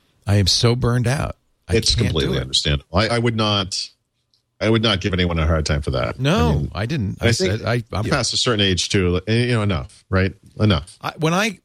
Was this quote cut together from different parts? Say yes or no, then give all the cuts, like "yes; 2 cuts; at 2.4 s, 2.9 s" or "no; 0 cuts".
yes; 3 cuts; at 3.1 s, 4.6 s, 8.0 s